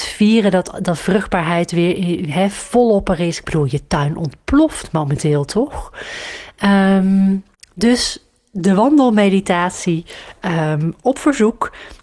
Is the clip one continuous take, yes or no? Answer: no